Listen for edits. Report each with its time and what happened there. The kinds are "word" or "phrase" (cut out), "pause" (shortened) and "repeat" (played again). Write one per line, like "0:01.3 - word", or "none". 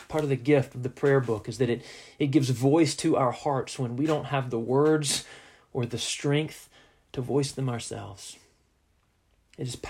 none